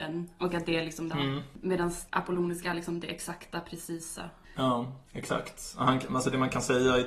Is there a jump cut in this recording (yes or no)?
yes